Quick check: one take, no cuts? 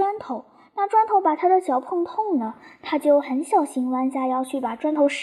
yes; 0 cuts

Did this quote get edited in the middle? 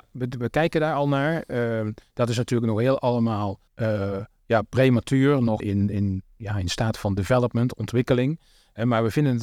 yes; 2 cuts; at 3.7 s, 5.6 s

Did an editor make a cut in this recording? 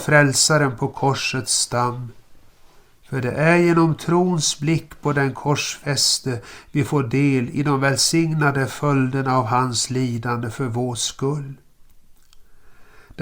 no; 0 cuts

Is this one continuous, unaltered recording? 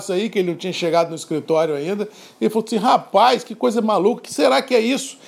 yes; 0 cuts

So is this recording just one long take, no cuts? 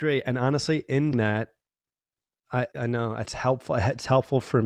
no; 3 cuts; at 1.1 s, 2.7 s, 3.3 s

